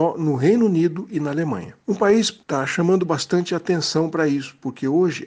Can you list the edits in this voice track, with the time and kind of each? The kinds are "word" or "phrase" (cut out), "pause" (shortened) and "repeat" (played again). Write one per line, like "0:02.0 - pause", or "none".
0:01.8 - pause